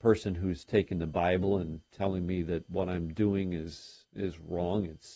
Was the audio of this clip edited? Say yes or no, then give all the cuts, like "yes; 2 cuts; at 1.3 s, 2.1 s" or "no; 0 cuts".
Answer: no; 0 cuts